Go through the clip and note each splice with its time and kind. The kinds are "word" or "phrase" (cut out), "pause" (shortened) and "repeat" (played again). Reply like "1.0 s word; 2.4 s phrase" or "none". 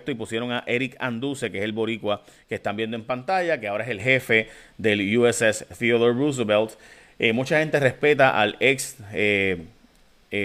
none